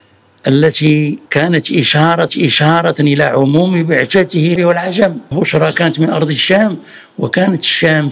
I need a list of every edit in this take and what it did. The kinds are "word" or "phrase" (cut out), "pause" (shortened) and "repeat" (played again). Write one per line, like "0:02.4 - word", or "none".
0:01.3 - pause
0:02.3 - repeat
0:04.6 - word
0:05.3 - word